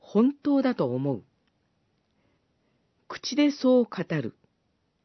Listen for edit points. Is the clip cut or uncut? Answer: uncut